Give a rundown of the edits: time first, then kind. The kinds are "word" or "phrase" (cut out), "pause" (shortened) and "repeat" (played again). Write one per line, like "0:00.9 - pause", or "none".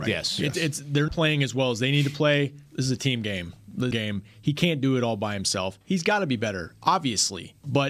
0:01.1 - word
0:02.7 - pause
0:03.9 - phrase